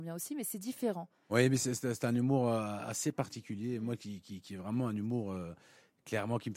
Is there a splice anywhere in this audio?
no; 0 cuts

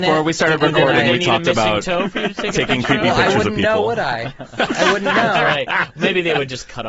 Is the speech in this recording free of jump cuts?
yes; 0 cuts

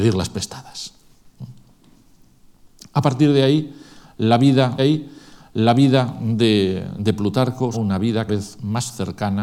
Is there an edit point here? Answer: yes; 3 cuts; at 4.8 s, 7.7 s, 8.3 s

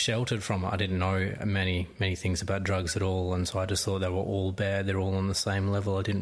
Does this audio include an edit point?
no; 0 cuts

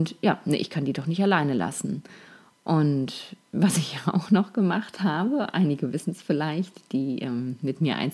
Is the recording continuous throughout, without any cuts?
yes; 0 cuts

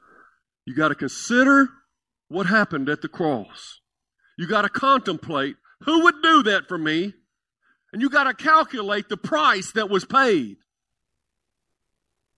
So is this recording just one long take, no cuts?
yes; 0 cuts

